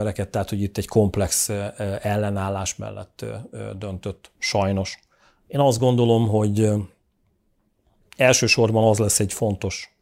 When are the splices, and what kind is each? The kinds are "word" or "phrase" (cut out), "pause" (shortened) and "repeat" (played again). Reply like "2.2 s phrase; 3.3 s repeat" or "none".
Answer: none